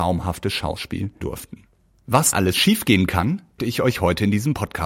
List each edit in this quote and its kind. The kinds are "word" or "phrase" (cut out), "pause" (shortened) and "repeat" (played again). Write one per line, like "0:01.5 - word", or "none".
0:01.2 - word
0:02.3 - word
0:03.6 - word